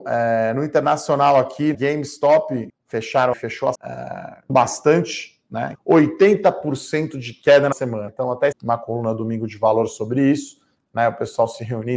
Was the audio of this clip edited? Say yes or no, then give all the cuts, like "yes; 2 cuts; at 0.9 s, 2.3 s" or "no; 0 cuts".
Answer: yes; 9 cuts; at 1.7 s, 2.7 s, 3.3 s, 3.7 s, 4.5 s, 5.7 s, 7.7 s, 8.1 s, 8.5 s